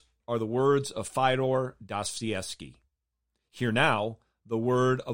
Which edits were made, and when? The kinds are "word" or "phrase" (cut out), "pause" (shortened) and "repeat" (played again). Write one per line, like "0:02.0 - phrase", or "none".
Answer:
none